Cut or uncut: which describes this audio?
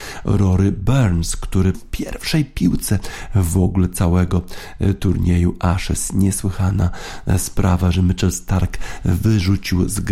cut